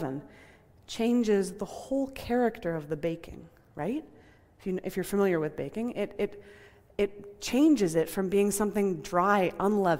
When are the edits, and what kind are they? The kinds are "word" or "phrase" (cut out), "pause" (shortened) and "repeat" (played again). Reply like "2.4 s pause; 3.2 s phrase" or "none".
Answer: none